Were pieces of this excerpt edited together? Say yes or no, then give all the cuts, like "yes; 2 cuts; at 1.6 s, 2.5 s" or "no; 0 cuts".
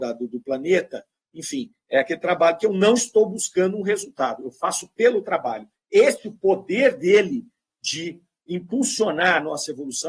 no; 0 cuts